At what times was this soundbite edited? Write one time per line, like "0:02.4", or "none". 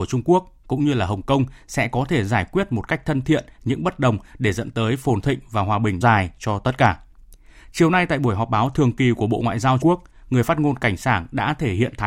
0:06.0
0:09.8

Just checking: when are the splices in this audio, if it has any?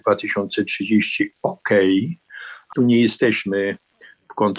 0:02.7

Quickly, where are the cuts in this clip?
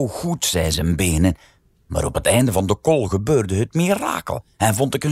none

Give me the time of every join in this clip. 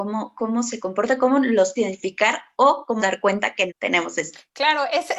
0:01.8
0:03.0
0:03.7

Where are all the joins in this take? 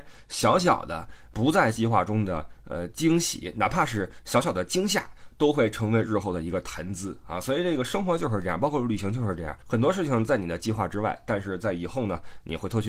0:09.6

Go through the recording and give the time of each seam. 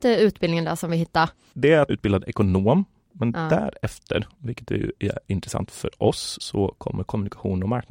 0:01.9

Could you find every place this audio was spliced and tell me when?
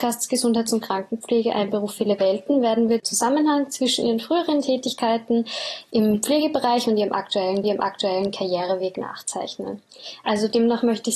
0:03.0
0:07.6

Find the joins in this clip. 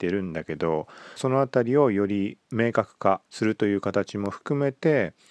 0:01.2
0:03.3

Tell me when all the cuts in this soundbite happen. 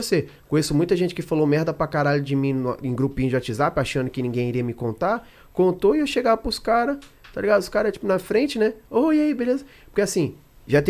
none

